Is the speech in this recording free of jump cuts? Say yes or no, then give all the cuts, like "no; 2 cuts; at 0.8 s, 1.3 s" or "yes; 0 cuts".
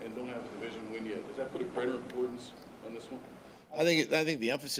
yes; 0 cuts